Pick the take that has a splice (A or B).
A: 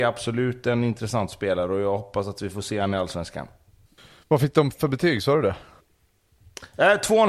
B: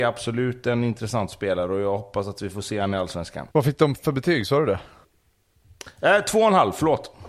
B